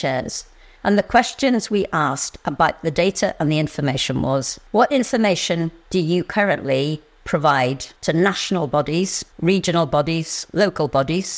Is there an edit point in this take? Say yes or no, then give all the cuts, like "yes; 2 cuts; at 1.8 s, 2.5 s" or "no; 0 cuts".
yes; 3 cuts; at 4.7 s, 8.0 s, 9.3 s